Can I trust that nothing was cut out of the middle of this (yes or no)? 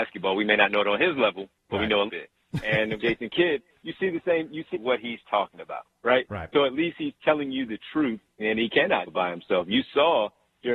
no